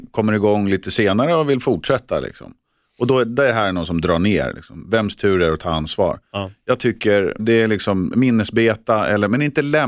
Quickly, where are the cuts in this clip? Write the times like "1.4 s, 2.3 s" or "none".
7.4 s